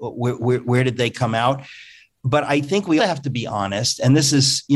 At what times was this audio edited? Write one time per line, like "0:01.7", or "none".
0:03.0

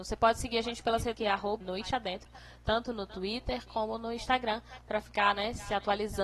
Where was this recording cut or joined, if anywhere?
0:01.1
0:01.6

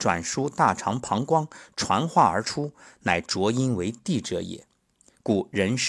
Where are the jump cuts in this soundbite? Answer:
none

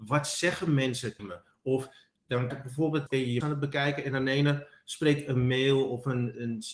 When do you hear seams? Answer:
0:01.2
0:02.5
0:03.1
0:03.4

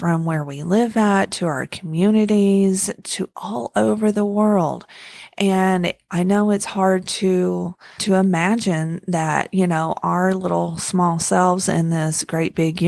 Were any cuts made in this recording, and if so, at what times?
0:08.0

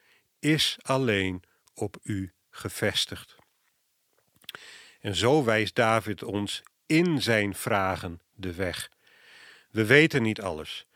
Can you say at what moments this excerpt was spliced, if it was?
none

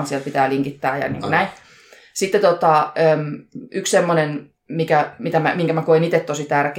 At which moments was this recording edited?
0:04.6

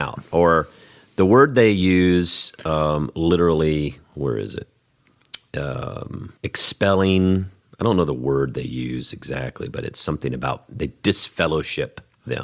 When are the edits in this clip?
0:04.0
0:06.4

